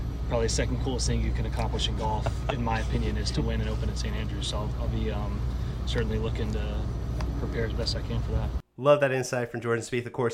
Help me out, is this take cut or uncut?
uncut